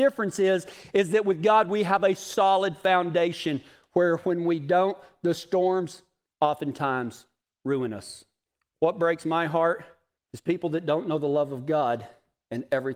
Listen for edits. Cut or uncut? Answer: uncut